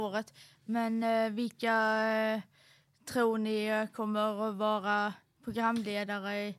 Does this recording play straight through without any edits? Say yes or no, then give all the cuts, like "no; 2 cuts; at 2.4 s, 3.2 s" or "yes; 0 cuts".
yes; 0 cuts